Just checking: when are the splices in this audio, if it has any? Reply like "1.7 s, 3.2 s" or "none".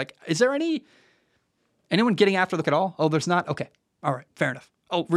2.6 s